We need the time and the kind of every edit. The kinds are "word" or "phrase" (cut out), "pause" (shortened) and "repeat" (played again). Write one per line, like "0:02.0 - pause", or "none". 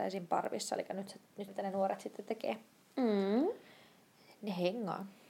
0:01.5 - word